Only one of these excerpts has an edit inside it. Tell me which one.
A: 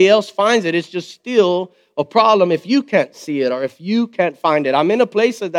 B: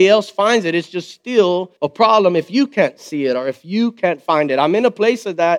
B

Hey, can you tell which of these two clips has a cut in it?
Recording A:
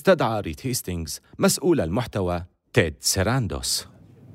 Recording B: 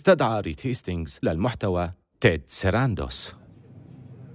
B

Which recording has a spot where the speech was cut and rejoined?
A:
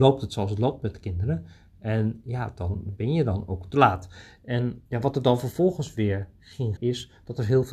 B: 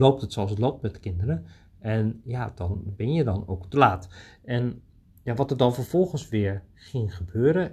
A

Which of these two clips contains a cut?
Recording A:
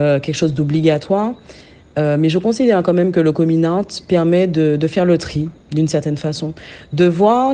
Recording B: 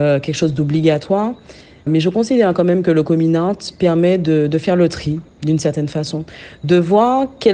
B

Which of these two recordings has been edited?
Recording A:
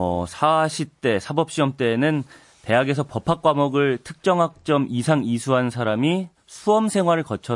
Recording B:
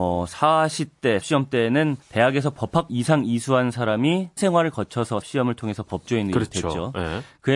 B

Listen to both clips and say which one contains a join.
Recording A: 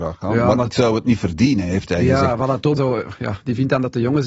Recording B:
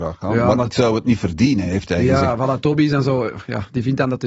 A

